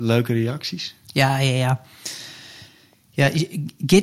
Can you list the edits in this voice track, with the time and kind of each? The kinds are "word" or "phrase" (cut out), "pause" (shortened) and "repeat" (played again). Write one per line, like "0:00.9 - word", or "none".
none